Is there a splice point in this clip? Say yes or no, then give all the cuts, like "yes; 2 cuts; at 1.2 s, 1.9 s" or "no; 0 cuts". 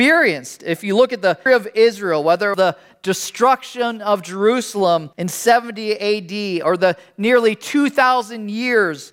yes; 3 cuts; at 1.5 s, 2.5 s, 5.1 s